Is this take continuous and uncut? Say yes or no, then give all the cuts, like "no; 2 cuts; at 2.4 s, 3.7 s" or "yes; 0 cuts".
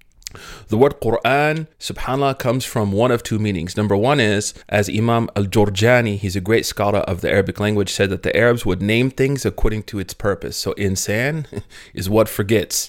no; 2 cuts; at 1.7 s, 4.6 s